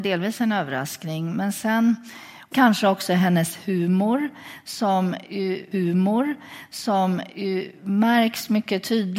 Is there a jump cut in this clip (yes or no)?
yes